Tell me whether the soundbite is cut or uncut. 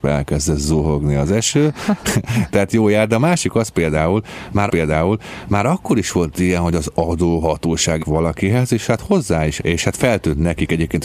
cut